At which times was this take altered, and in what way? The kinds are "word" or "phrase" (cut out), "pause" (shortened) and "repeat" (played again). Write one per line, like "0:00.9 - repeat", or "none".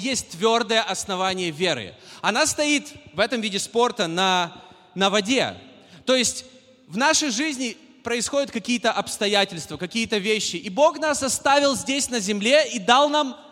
none